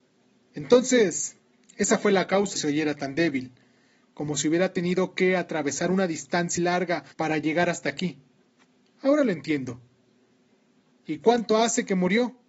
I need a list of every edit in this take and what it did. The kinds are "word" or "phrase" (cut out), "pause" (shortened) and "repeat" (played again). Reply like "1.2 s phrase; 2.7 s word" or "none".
2.6 s phrase; 6.6 s word; 7.1 s pause